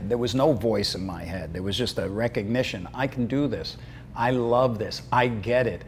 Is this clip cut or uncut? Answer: uncut